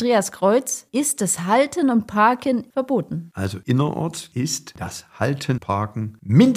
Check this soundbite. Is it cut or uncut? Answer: cut